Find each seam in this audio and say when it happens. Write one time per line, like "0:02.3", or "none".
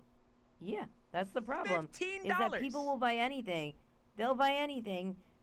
none

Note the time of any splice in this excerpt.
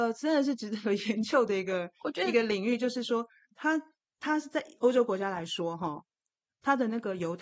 0:04.8

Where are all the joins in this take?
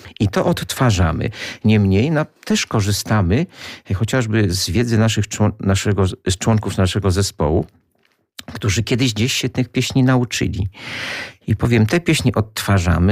none

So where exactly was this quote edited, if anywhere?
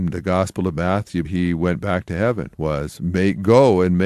0:01.2

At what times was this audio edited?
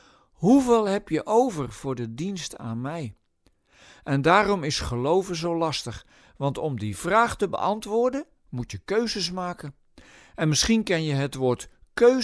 none

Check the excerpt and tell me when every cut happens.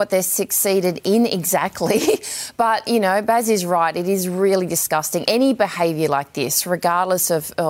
none

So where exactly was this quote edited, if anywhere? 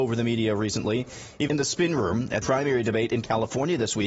0:01.5
0:02.4

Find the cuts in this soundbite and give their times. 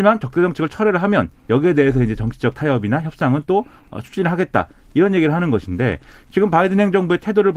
none

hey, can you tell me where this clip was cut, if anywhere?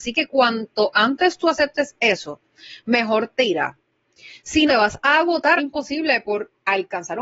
0:04.7
0:05.6

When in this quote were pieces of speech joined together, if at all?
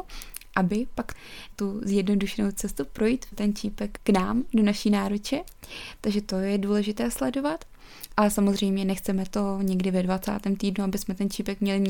0:03.3
0:04.0

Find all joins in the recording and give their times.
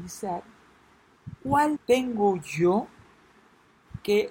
0:01.8

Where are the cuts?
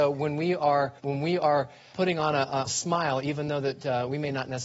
0:01.0
0:01.9
0:02.7

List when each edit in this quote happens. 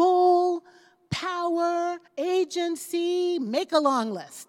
0:02.1

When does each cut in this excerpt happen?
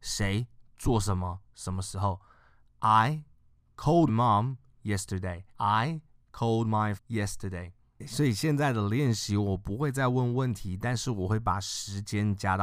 0:04.1
0:05.5
0:07.0

